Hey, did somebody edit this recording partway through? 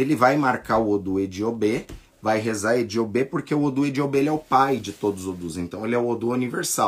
no; 0 cuts

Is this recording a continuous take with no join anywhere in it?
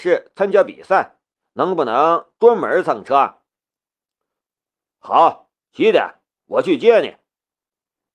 yes; 0 cuts

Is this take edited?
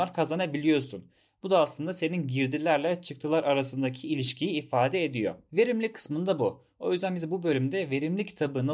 no; 0 cuts

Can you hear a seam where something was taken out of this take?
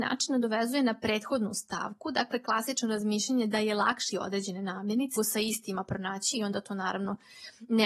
yes; 3 cuts; at 4.1 s, 5.2 s, 6.3 s

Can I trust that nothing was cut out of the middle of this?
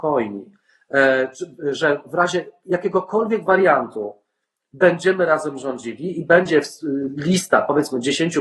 yes; 0 cuts

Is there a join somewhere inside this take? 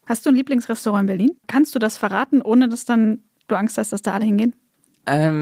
yes; 1 cut; at 1.4 s

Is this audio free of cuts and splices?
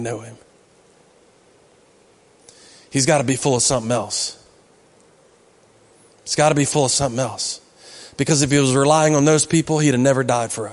yes; 0 cuts

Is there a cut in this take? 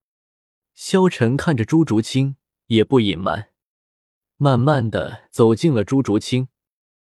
no; 0 cuts

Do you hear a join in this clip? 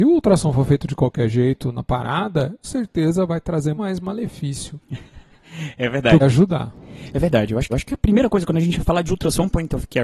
yes; 4 cuts; at 2.6 s, 3.8 s, 6.2 s, 7.7 s

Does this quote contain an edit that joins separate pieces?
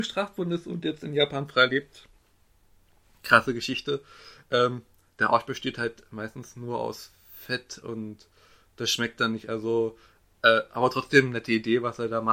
no; 0 cuts

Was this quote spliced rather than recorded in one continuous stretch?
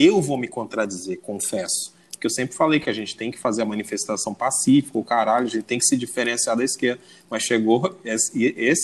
no; 0 cuts

